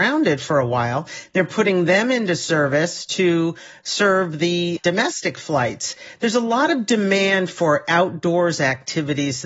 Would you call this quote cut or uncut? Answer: uncut